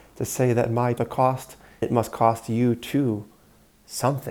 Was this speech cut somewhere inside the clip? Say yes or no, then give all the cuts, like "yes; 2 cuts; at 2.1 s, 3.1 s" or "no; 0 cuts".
yes; 2 cuts; at 1.0 s, 1.8 s